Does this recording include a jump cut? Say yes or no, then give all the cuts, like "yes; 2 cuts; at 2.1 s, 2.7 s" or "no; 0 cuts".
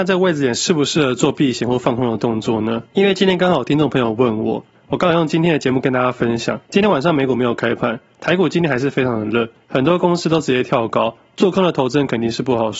yes; 2 cuts; at 2.9 s, 6.6 s